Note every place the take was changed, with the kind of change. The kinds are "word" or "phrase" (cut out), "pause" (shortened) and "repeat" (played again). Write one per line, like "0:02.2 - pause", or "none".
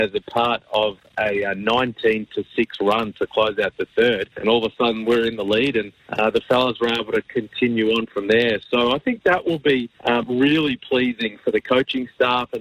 0:04.3 - pause
0:06.0 - pause
0:09.9 - pause

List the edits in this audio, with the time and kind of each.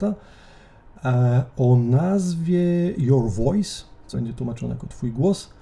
0:04.1 - word

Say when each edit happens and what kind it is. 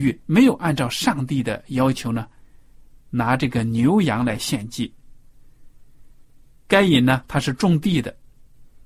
none

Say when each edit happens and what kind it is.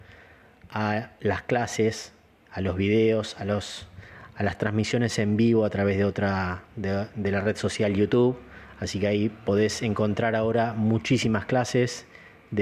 0:02.3 - pause
0:06.7 - pause

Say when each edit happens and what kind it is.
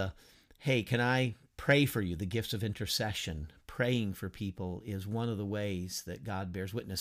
none

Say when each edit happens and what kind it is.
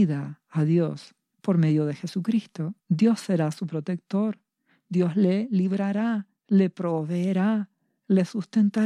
0:02.8 - pause
0:06.4 - pause

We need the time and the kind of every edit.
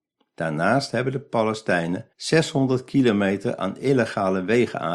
0:02.1 - pause

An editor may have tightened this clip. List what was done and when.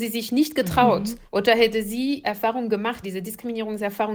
0:01.3 - pause
0:02.2 - phrase
0:03.0 - word

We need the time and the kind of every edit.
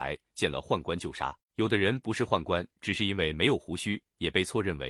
0:01.4 - pause

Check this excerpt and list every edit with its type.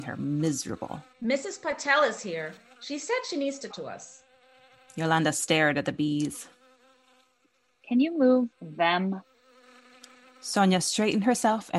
0:01.1 - pause
0:03.7 - word
0:08.5 - pause

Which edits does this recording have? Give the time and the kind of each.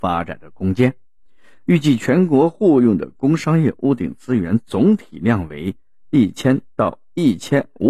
none

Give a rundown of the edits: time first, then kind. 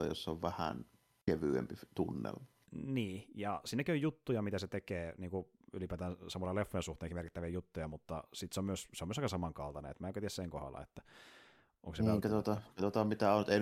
none

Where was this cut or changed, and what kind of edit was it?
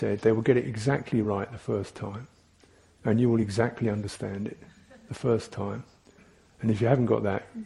none

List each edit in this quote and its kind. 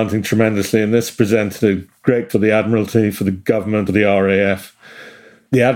0:02.3 - word
0:03.9 - word

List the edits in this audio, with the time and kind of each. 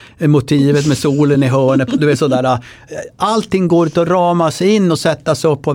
none

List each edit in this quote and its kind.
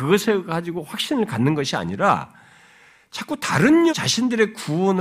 0:03.9 - word

